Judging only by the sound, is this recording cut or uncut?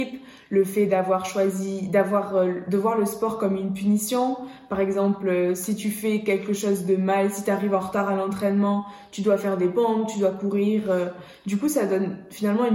uncut